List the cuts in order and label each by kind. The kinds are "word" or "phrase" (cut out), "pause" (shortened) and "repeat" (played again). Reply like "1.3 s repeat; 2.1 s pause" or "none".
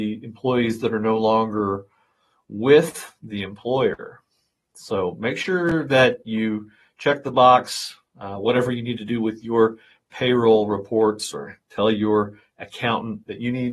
none